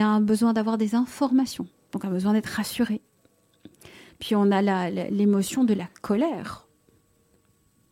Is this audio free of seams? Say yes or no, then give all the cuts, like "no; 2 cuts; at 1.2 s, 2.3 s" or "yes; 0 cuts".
yes; 0 cuts